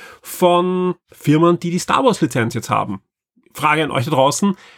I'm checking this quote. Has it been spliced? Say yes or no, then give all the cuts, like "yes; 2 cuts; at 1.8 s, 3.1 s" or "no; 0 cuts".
no; 0 cuts